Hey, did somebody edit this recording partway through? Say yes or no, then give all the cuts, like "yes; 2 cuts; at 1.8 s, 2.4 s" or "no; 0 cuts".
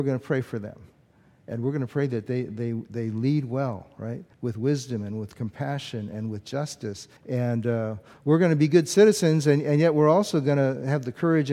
yes; 2 cuts; at 4.3 s, 7.2 s